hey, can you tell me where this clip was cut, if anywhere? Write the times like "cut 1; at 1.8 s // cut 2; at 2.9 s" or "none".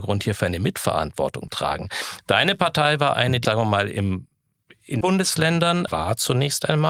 cut 1; at 1.5 s // cut 2; at 3.4 s // cut 3; at 5.0 s // cut 4; at 5.9 s